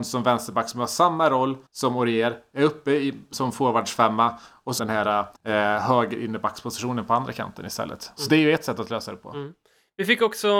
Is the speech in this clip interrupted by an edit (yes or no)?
yes